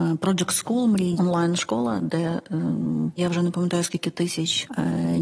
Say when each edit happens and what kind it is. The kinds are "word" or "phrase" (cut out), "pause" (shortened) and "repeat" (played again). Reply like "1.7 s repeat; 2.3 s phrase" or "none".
1.1 s word; 3.2 s word